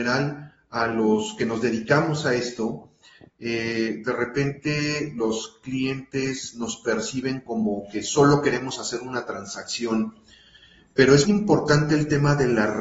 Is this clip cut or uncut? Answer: cut